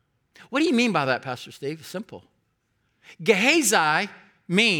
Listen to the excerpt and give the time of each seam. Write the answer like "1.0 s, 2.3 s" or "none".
none

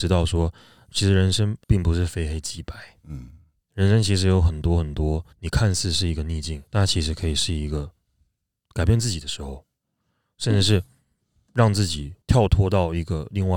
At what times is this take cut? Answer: 1.6 s, 5.3 s, 6.7 s, 12.2 s

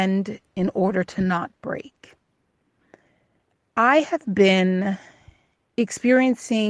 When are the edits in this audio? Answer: none

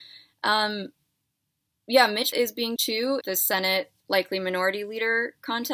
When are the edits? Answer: 2.3 s, 2.8 s, 3.2 s

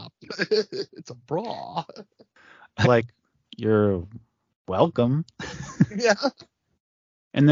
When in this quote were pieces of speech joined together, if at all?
2.8 s

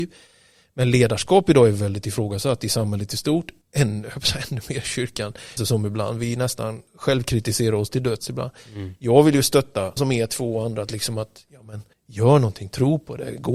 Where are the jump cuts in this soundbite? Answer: 3.6 s, 5.6 s, 6.9 s, 10.0 s, 11.9 s

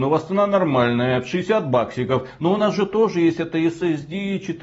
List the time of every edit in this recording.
none

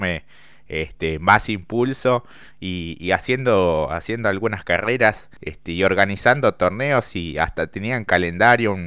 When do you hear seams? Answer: 5.4 s

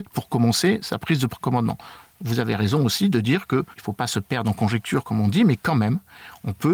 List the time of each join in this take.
none

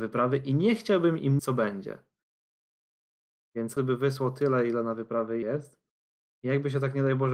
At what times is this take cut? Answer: 1.4 s, 3.8 s, 5.4 s

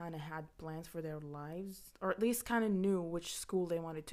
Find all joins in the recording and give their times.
none

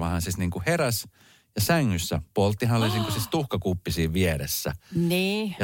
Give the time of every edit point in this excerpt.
none

